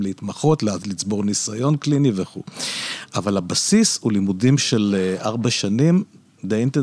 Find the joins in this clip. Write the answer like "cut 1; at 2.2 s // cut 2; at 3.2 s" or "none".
none